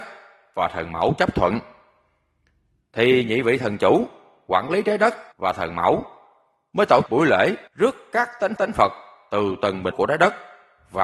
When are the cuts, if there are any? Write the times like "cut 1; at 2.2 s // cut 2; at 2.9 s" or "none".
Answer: cut 1; at 5.3 s // cut 2; at 7.1 s // cut 3; at 7.7 s // cut 4; at 8.6 s // cut 5; at 9.9 s